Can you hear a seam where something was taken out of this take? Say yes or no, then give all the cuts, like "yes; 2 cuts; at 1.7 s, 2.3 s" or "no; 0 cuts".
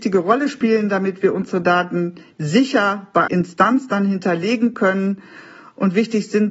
yes; 1 cut; at 3.3 s